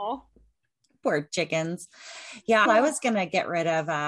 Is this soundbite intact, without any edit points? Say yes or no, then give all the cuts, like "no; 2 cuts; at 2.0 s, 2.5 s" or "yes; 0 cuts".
no; 1 cut; at 2.6 s